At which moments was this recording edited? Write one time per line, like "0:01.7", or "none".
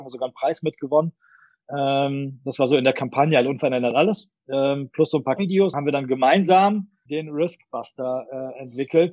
0:05.4
0:05.7
0:07.1